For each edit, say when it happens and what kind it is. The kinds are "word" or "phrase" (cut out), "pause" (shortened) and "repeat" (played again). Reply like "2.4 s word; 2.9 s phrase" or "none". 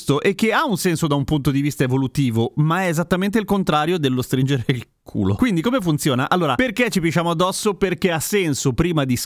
none

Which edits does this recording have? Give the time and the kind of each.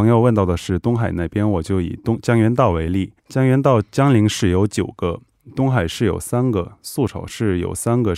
3.2 s pause

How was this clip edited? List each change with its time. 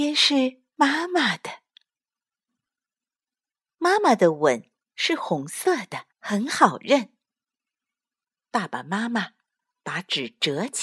6.1 s pause

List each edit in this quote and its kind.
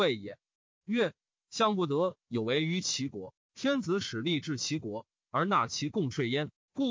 none

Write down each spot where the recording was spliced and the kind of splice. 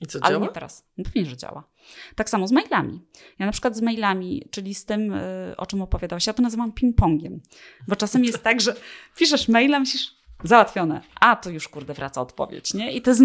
none

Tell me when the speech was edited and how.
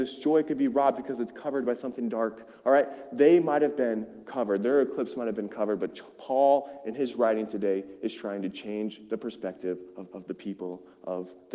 10.1 s repeat

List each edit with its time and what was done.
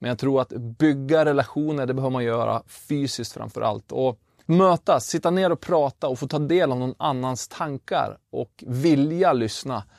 4.4 s word

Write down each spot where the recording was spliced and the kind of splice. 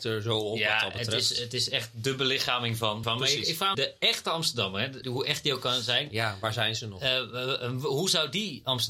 3.0 s phrase; 3.7 s phrase; 5.0 s word

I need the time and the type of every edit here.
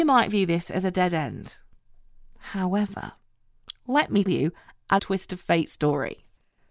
4.3 s word; 5.0 s word

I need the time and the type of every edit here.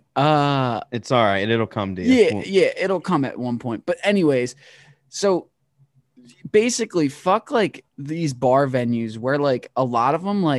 none

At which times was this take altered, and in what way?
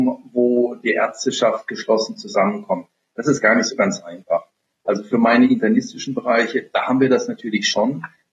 none

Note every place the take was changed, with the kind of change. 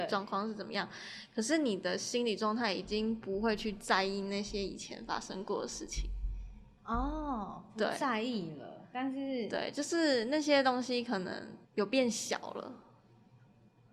11.6 s pause

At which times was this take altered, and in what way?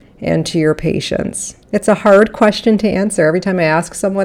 1.6 s pause

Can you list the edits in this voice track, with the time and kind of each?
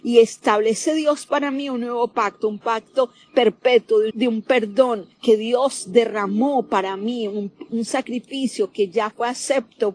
4.1 s word; 5.1 s pause

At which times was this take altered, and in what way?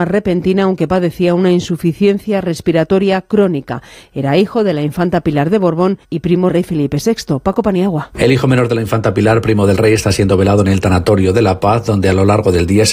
6.0 s pause; 6.5 s phrase

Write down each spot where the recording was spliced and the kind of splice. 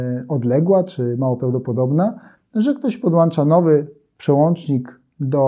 none

